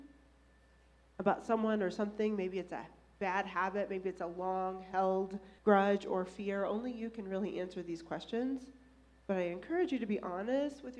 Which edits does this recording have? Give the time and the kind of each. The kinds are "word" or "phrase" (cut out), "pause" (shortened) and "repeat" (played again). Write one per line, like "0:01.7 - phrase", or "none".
0:05.6 - pause